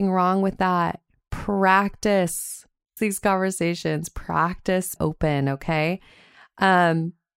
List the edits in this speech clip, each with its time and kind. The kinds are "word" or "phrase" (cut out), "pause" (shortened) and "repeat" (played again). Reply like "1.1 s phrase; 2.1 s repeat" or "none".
3.0 s word; 5.0 s word

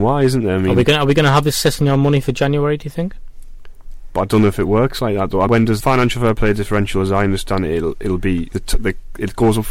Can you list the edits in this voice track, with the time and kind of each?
5.5 s word; 5.8 s phrase; 8.5 s word

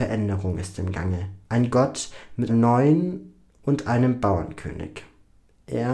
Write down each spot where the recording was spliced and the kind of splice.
1.4 s pause; 2.5 s word

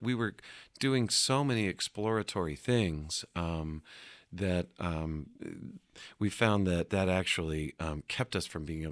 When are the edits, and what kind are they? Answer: 6.9 s word

